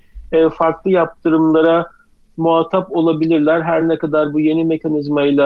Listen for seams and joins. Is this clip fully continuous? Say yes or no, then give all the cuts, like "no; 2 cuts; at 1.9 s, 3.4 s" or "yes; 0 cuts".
yes; 0 cuts